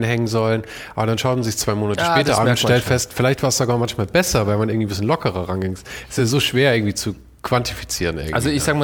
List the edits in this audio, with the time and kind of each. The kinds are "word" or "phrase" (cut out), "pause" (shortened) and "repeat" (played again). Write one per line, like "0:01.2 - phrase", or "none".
none